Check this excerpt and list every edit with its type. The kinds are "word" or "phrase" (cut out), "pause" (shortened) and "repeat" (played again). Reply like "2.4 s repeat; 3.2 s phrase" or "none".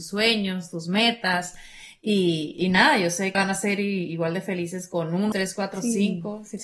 3.3 s word; 5.3 s word